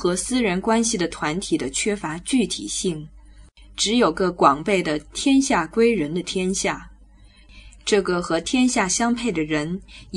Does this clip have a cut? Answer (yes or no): no